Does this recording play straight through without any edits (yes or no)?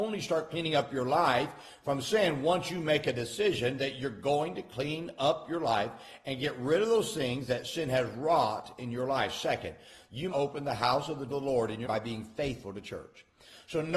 no